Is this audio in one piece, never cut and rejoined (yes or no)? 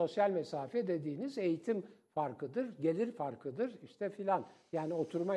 yes